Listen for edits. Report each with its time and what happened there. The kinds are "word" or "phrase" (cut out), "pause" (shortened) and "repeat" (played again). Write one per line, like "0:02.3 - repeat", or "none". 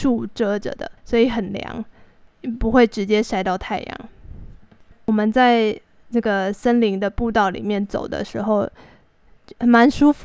0:01.0 - pause

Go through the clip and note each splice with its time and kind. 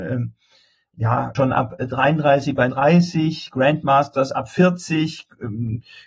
0:01.3 - word
0:02.7 - phrase

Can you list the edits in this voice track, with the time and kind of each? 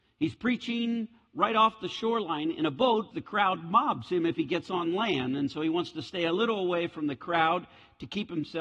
0:03.1 - word

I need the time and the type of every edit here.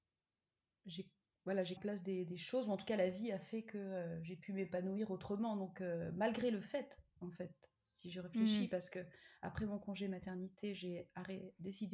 0:01.8 - phrase

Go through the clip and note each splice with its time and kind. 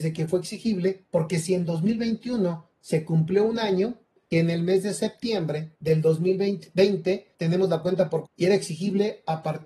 0:04.3 - phrase
0:05.8 - pause
0:07.3 - pause
0:08.3 - word

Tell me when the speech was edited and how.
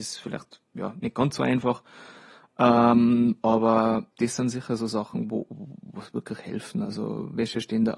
0:04.1 - word

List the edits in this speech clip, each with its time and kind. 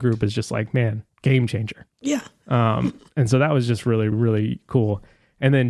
0:01.1 - pause
0:01.9 - pause
0:04.1 - word

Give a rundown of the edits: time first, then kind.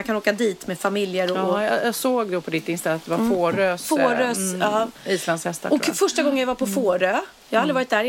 none

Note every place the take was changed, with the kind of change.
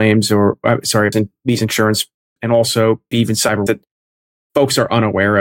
0:01.1 - word
0:02.4 - word
0:03.1 - word
0:03.7 - word

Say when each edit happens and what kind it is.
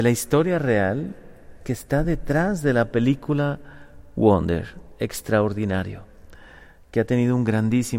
none

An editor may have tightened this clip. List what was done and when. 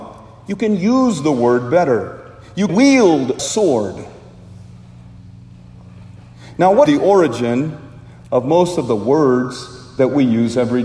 0:02.7 - word
0:03.4 - phrase
0:06.9 - word

